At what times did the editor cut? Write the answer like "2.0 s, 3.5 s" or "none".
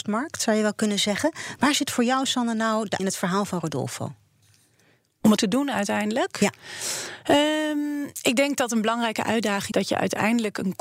3.0 s, 5.4 s, 9.7 s